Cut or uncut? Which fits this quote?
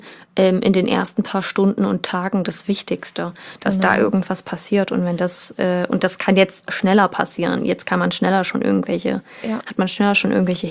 uncut